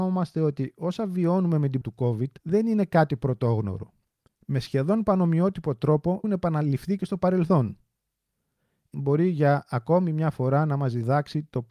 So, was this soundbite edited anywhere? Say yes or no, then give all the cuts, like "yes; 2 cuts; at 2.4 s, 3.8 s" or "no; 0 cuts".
yes; 5 cuts; at 1.8 s, 2.4 s, 4.3 s, 6.2 s, 8.9 s